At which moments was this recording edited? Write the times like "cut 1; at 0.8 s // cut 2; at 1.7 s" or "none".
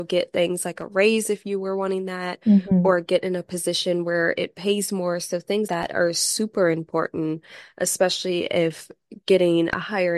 cut 1; at 5.7 s